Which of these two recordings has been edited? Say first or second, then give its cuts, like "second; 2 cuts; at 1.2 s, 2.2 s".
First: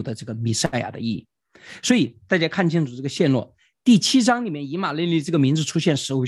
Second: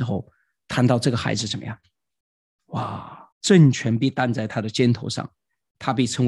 second; 1 cut; at 3.3 s